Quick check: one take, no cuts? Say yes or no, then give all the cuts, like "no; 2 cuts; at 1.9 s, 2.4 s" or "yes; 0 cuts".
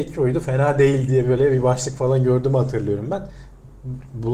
yes; 0 cuts